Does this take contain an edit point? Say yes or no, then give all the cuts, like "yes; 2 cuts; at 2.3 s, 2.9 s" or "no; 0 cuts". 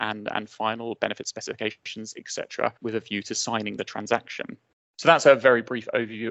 yes; 2 cuts; at 2.8 s, 4.7 s